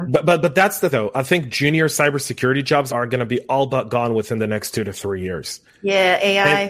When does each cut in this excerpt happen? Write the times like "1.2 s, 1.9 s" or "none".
0.9 s, 2.9 s

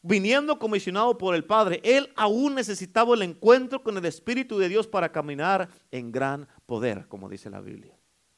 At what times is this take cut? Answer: none

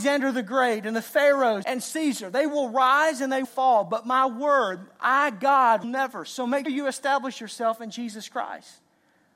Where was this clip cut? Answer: 1.6 s, 3.4 s, 5.8 s, 6.7 s

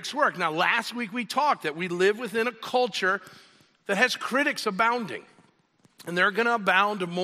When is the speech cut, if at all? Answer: none

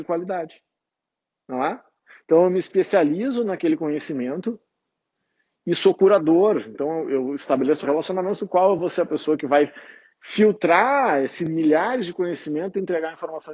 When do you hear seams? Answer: none

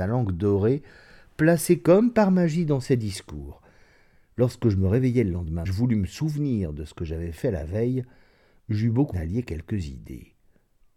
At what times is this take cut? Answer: 5.7 s, 9.1 s

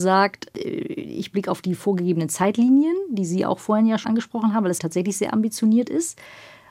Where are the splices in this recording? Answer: 1.3 s, 4.0 s, 4.8 s

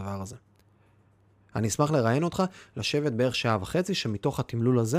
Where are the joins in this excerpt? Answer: none

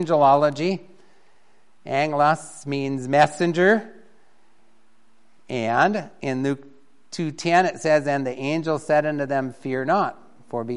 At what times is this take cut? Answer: none

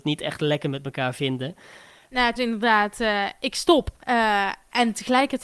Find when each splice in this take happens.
2.4 s, 4.0 s

